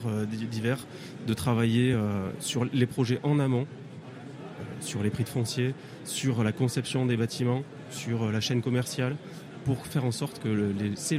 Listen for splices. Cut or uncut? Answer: uncut